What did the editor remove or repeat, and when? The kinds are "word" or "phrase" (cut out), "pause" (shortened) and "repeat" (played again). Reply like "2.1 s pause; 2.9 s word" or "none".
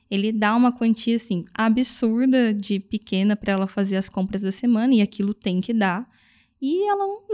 none